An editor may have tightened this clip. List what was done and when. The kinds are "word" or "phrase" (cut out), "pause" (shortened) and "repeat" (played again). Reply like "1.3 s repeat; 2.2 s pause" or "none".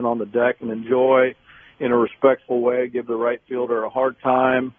none